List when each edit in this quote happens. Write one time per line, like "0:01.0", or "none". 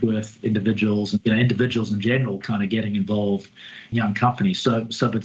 0:01.2
0:03.9